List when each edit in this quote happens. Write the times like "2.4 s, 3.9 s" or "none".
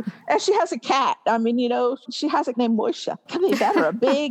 2.1 s, 2.5 s, 3.3 s